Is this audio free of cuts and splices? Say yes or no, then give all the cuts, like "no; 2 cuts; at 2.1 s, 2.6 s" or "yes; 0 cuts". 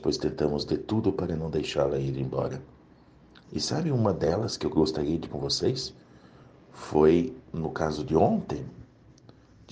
no; 3 cuts; at 3.4 s, 5.3 s, 7.4 s